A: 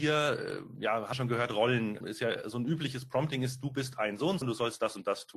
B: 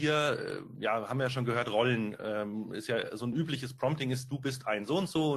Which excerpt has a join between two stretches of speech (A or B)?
A